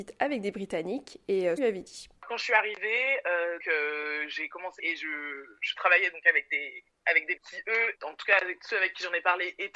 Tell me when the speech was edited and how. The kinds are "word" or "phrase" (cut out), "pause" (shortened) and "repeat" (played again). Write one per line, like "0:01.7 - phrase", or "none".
0:01.6 - phrase
0:02.2 - pause
0:03.6 - word
0:04.8 - phrase
0:07.4 - word
0:07.9 - word

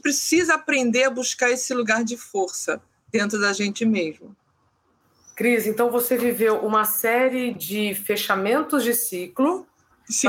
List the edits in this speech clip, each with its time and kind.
none

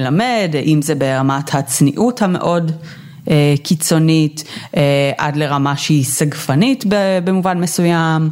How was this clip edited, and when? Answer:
none

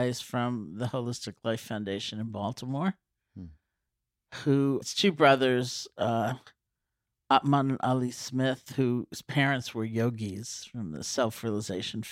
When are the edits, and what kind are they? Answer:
0:04.8 - word

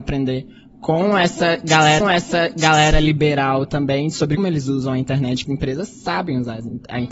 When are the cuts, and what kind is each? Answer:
0:02.0 - repeat
0:04.4 - word
0:05.5 - phrase

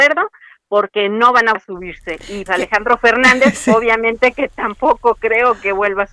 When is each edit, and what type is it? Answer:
0:01.5 - word
0:02.5 - word

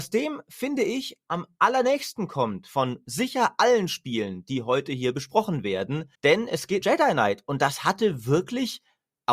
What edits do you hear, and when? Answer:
0:06.1 - pause
0:06.8 - word

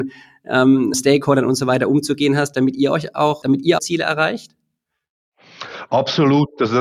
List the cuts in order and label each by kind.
0:00.9 - word
0:03.4 - word
0:03.8 - phrase

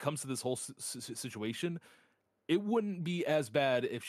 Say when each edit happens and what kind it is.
none

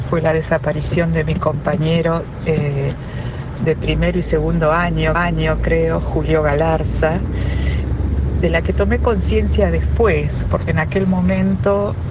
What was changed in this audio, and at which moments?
0:05.1 - repeat

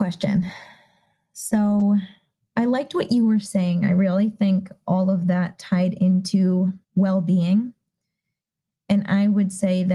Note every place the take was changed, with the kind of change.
0:02.4 - pause
0:06.8 - pause

